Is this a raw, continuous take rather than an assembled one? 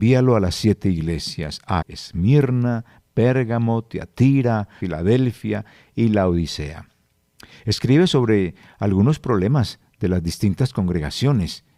no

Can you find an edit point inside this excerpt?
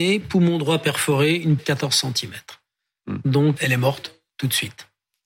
yes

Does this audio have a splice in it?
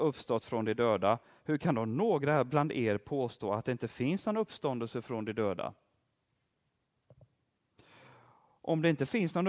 no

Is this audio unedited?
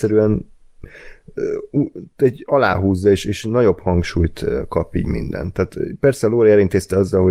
yes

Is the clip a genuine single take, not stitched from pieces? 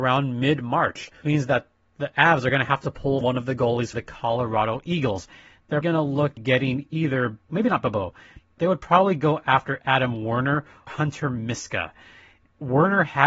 no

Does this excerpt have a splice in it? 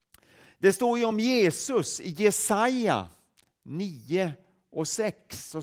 no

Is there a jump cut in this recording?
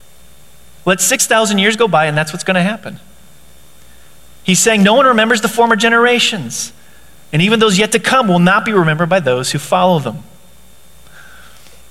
no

